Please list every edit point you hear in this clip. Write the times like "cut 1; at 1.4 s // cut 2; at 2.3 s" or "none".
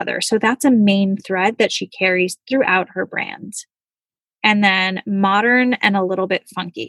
none